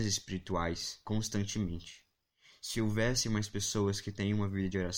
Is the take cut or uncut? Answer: uncut